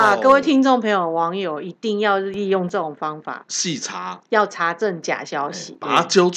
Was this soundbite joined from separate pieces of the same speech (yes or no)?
yes